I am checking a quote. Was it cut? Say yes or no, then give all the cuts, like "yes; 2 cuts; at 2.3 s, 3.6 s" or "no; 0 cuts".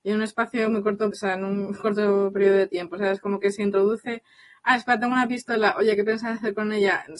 yes; 1 cut; at 1.1 s